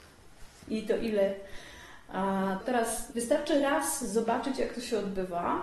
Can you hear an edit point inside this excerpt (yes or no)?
yes